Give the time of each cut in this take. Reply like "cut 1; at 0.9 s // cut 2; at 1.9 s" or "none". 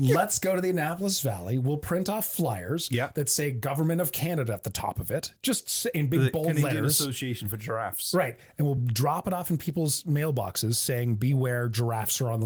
none